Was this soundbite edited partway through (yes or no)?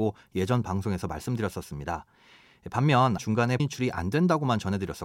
yes